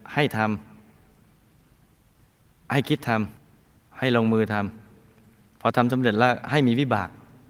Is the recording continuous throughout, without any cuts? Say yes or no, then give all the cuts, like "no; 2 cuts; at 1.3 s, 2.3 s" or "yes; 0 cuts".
no; 1 cut; at 3.4 s